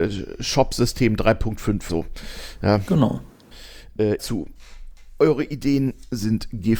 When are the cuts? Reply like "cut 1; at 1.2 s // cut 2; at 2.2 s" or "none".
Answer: cut 1; at 1.9 s // cut 2; at 4.2 s